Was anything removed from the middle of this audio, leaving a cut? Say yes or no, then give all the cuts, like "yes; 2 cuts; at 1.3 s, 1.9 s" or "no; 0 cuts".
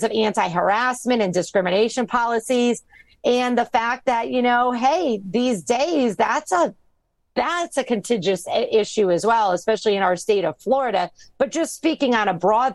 no; 0 cuts